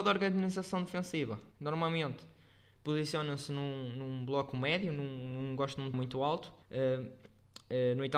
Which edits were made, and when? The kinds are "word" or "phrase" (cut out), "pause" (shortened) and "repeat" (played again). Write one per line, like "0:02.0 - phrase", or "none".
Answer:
0:01.5 - pause
0:05.9 - word
0:06.6 - pause

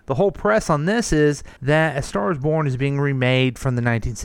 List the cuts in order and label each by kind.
0:01.6 - pause

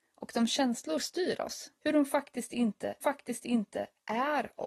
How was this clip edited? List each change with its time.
0:01.0 - word
0:01.8 - pause
0:03.0 - repeat

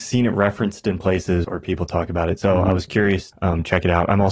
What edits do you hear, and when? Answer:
0:01.4 - word
0:03.3 - word

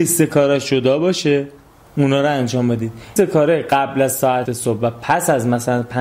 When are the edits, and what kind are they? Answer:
0:03.2 - word
0:04.4 - word

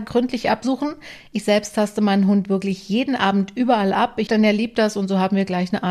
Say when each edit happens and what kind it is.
0:04.3 - phrase

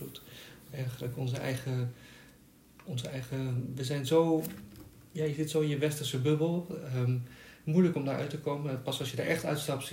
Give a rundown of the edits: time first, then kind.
none

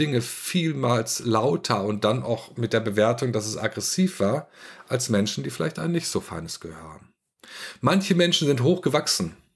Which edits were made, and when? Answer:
none

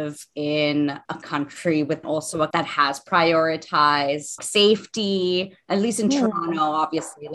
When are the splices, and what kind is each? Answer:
0:02.0 - phrase
0:02.5 - word
0:04.4 - word

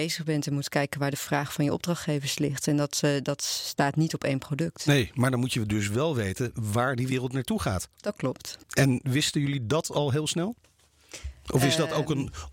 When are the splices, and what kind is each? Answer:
0:08.6 - pause

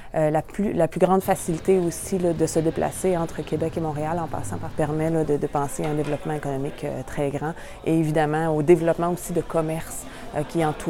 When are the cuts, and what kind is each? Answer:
0:02.4 - word
0:04.7 - word
0:05.2 - word

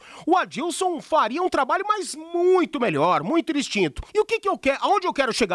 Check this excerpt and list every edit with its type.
0:04.1 - pause

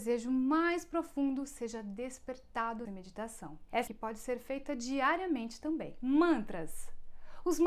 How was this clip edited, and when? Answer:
0:02.9 - word
0:03.9 - phrase

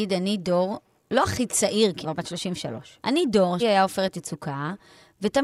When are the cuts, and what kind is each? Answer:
0:02.0 - word
0:03.0 - word
0:03.6 - word

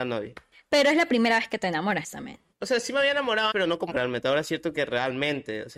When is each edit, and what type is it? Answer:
0:02.0 - word
0:03.5 - word
0:03.9 - word

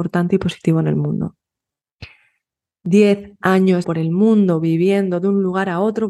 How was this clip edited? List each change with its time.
0:03.8 - word

